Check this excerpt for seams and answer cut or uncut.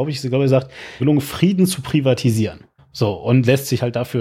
cut